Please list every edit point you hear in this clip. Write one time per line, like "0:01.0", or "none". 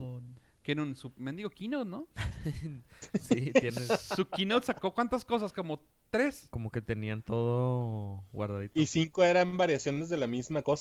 none